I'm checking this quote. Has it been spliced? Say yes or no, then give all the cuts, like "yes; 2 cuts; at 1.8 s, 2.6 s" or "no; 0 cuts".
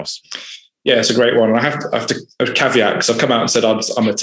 no; 0 cuts